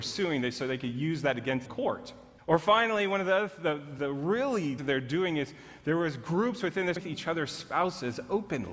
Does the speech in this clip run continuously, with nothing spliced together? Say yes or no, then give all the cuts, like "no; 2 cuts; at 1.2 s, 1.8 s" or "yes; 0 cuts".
no; 5 cuts; at 1.7 s, 2.4 s, 4.0 s, 4.8 s, 7.0 s